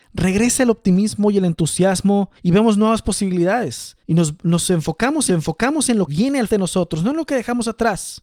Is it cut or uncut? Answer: cut